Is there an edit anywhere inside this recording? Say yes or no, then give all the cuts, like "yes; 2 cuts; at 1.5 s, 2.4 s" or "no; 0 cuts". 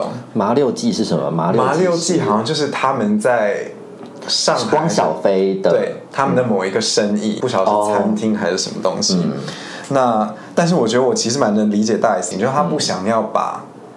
yes; 2 cuts; at 7.4 s, 12.3 s